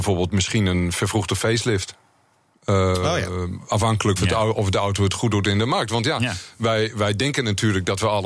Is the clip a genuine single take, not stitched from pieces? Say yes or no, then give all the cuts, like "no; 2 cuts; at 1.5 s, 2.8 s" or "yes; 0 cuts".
no; 1 cut; at 4.2 s